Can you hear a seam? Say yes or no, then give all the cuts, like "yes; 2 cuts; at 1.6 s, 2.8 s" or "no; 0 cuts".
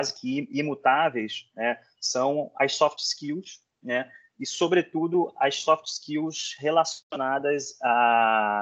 no; 0 cuts